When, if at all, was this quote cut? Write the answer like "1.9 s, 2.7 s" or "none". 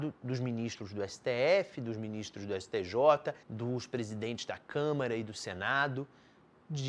3.4 s